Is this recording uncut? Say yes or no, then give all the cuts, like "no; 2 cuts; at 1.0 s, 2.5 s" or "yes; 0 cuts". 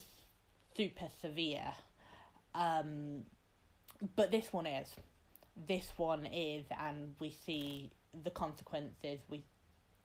yes; 0 cuts